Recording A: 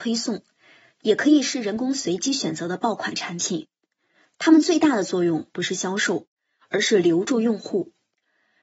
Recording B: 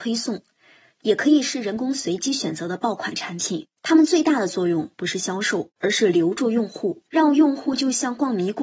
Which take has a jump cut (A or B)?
B